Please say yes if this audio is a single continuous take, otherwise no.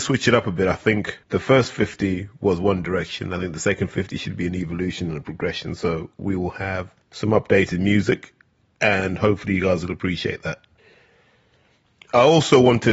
no